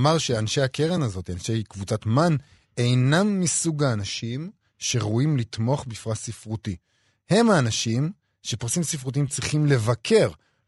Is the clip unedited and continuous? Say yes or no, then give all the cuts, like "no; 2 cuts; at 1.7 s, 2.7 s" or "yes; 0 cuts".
yes; 0 cuts